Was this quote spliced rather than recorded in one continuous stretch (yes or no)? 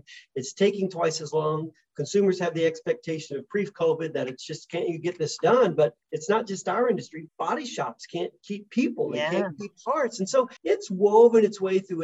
yes